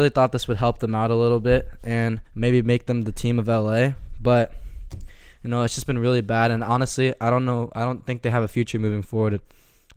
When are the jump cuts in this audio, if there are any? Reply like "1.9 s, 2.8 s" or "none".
2.2 s